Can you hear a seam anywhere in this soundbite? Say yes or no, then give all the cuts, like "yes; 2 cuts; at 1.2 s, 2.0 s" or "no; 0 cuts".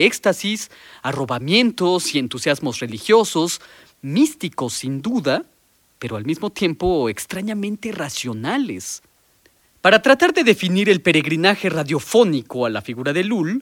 no; 0 cuts